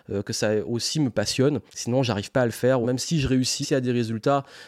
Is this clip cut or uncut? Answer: cut